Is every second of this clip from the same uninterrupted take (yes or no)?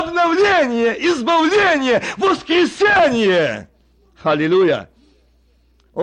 yes